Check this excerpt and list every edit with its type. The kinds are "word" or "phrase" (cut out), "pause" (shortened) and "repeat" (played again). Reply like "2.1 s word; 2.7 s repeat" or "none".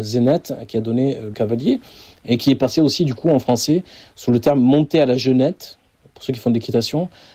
1.3 s word